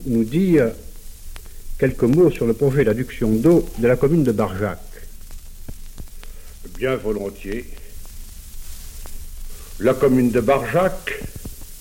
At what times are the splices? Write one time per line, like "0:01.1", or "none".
none